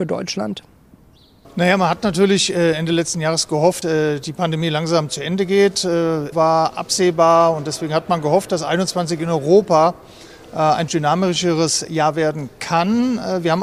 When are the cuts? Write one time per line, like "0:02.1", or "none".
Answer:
0:03.8
0:06.3
0:10.9